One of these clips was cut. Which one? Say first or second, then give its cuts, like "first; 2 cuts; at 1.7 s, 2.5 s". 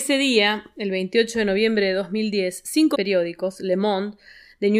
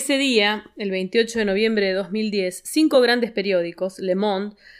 first; 1 cut; at 2.9 s